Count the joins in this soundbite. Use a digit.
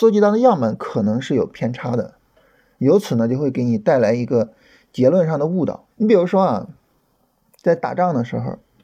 1